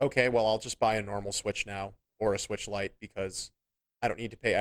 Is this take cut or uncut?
uncut